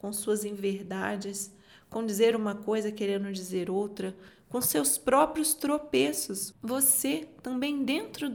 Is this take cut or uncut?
uncut